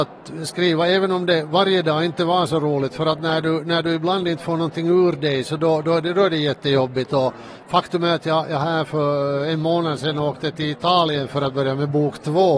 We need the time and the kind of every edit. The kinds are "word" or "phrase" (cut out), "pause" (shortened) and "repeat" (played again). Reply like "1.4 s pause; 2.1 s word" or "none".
none